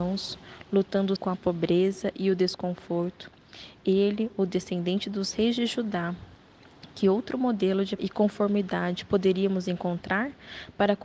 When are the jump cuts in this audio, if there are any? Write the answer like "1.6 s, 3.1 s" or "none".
1.2 s, 8.0 s